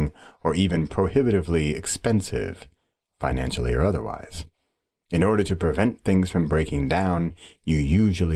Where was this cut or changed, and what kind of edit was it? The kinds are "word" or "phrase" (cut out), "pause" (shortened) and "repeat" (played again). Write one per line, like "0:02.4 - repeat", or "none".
none